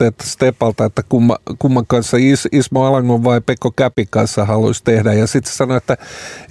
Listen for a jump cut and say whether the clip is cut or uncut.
uncut